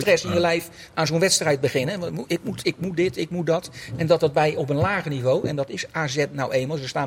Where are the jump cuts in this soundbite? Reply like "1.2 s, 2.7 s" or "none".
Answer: none